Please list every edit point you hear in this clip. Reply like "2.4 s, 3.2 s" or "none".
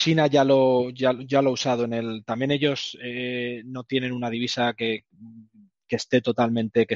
none